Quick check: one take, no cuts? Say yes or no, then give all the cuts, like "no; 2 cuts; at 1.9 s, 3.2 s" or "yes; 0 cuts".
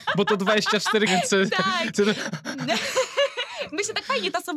no; 1 cut; at 1.1 s